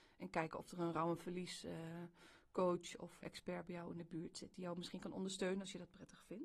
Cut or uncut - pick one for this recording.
cut